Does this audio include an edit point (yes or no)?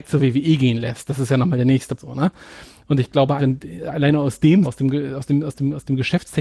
yes